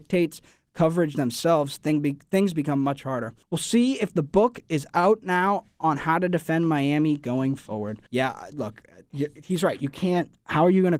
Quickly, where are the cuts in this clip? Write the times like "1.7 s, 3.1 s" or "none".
3.4 s, 8.1 s